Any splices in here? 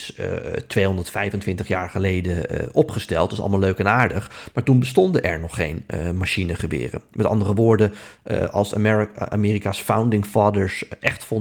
no; 0 cuts

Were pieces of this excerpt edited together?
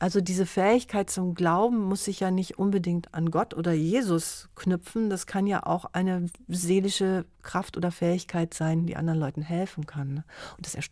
no; 0 cuts

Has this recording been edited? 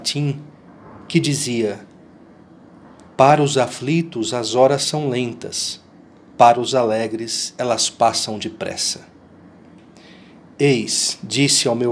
no; 0 cuts

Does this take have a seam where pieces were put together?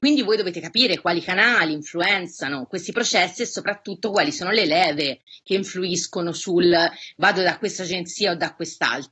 no; 0 cuts

